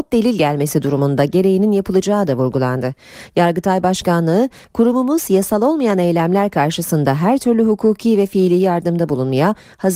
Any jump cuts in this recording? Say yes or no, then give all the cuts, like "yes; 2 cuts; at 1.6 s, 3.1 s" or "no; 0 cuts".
no; 0 cuts